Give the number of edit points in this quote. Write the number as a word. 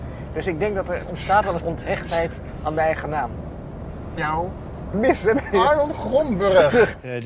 four